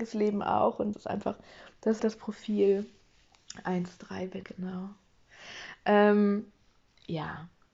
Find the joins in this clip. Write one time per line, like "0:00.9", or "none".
0:00.9
0:02.0
0:04.4